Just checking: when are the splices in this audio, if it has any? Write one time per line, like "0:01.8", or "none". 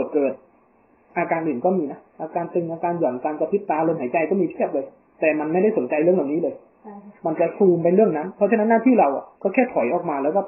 0:02.1
0:05.0
0:07.2
0:09.3